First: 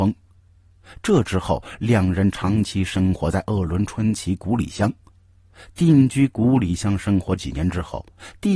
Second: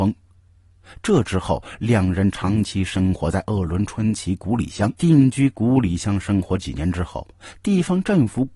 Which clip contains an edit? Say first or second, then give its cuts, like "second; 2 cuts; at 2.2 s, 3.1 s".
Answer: second; 1 cut; at 5.0 s